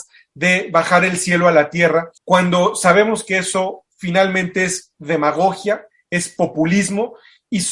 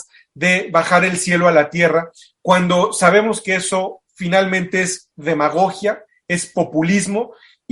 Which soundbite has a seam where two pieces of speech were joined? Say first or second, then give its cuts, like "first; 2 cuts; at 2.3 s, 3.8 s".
first; 1 cut; at 2.2 s